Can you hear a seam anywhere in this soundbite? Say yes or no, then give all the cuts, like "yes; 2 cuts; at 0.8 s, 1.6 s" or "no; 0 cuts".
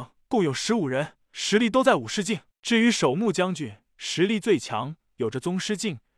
no; 0 cuts